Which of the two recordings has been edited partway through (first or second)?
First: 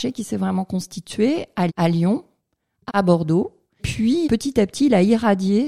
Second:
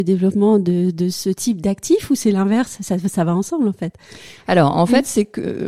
first